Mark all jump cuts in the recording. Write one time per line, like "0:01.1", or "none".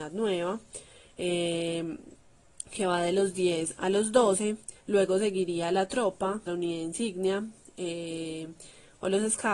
0:04.8
0:06.5